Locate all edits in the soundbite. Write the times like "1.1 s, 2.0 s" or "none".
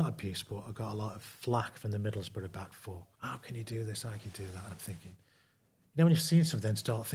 3.1 s